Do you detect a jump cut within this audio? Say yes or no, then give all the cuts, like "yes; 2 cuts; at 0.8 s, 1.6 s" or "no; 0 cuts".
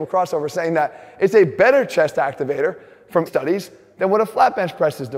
yes; 1 cut; at 3.3 s